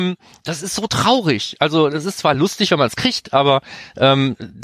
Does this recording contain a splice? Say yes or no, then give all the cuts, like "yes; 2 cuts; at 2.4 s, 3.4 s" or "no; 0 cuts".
no; 0 cuts